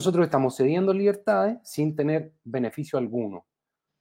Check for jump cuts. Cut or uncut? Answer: uncut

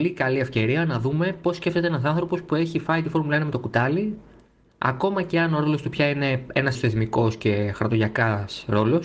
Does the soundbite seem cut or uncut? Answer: cut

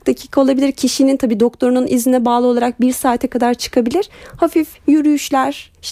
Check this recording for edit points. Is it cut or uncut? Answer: uncut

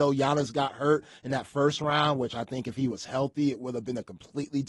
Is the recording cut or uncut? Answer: uncut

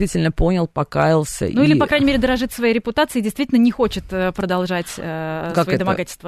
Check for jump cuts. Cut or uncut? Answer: uncut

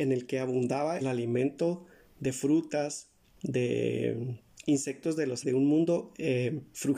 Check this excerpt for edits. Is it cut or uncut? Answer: cut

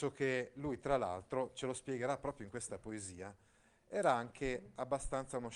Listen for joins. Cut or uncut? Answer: uncut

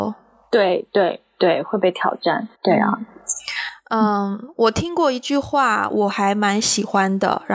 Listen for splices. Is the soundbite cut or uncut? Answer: cut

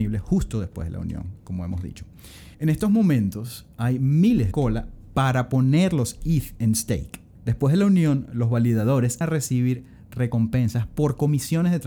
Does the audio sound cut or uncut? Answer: cut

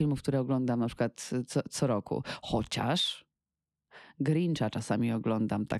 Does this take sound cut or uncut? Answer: uncut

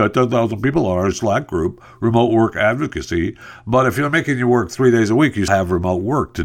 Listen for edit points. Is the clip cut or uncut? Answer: cut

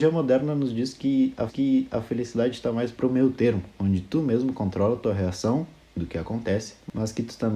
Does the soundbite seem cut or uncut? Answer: cut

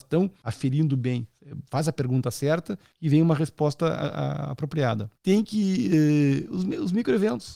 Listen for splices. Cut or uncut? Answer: uncut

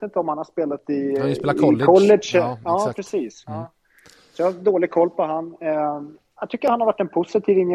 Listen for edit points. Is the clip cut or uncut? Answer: uncut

